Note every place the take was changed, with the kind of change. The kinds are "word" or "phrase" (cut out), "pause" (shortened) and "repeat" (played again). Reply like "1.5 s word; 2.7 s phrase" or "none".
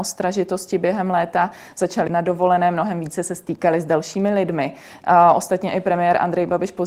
2.1 s word